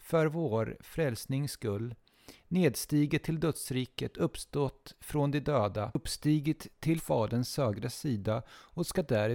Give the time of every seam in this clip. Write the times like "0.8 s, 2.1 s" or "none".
7.0 s